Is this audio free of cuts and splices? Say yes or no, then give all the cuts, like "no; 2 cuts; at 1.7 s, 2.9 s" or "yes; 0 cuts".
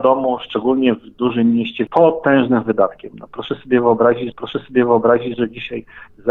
no; 2 cuts; at 1.9 s, 4.3 s